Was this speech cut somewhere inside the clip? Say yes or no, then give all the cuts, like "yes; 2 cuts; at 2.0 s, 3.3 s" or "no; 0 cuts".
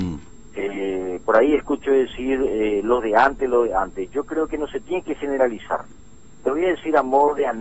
no; 0 cuts